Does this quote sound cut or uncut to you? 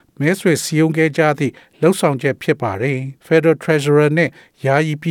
cut